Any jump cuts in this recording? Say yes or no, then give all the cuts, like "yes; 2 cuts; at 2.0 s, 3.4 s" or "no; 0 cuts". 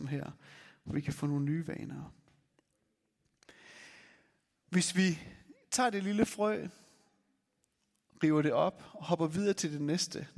no; 0 cuts